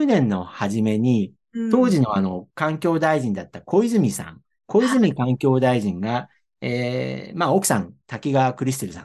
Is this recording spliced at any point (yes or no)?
no